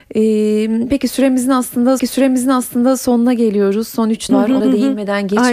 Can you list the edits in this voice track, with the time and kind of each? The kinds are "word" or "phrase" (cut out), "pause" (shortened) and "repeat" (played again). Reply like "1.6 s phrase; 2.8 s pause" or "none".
2.0 s repeat; 4.3 s phrase; 4.6 s word